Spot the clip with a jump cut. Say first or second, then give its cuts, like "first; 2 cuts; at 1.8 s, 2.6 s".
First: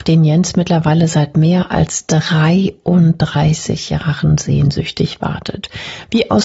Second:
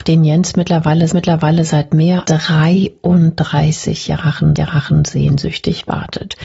second; 3 cuts; at 1.1 s, 2.2 s, 4.6 s